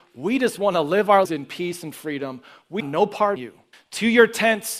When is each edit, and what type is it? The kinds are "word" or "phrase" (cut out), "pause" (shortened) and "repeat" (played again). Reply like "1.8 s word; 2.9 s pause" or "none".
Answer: 1.2 s word; 2.8 s word; 3.4 s word; 3.7 s pause